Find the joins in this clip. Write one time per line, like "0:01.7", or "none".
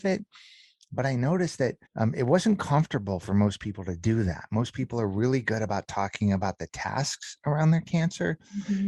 0:01.9